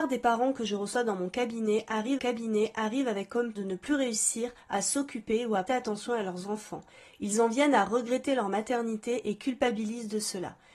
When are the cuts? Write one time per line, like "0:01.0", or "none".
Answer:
0:02.2
0:03.5
0:05.7